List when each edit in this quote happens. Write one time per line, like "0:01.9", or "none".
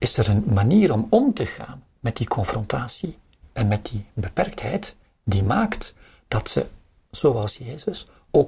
none